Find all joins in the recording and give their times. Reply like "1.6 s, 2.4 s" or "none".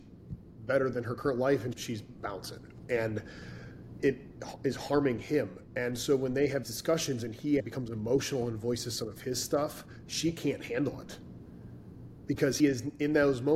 1.7 s, 4.0 s, 6.6 s, 7.6 s, 12.6 s